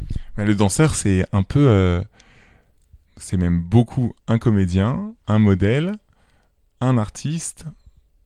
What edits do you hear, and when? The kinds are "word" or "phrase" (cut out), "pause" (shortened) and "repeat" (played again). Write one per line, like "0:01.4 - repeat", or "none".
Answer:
0:03.1 - pause
0:04.2 - pause
0:05.2 - pause